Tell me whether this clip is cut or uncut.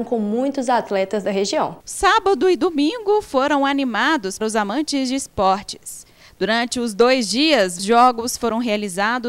cut